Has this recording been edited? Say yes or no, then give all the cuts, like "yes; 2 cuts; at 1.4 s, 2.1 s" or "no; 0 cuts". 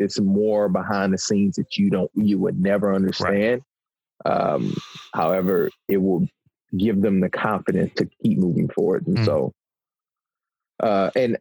no; 0 cuts